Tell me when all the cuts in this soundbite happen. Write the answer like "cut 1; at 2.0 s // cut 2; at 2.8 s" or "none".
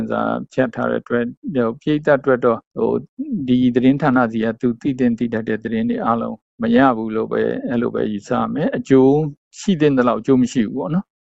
cut 1; at 2.7 s